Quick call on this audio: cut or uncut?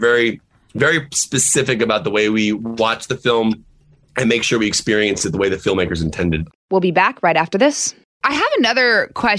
uncut